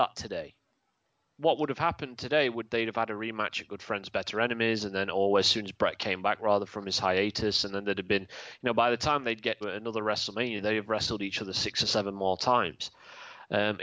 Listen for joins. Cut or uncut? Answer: cut